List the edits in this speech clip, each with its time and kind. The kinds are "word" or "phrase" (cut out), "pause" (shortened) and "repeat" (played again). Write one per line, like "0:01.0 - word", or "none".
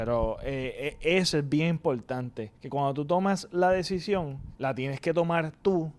0:02.6 - pause
0:04.5 - pause

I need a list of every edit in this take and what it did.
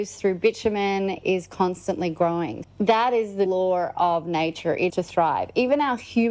0:01.2 - word
0:02.6 - word
0:03.5 - word
0:04.9 - word

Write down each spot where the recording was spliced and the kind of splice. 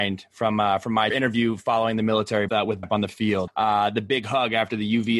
0:01.1 - phrase
0:02.5 - phrase
0:02.8 - word
0:03.5 - word

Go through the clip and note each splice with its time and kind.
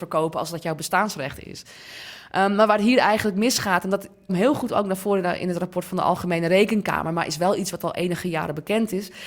0:04.3 - word

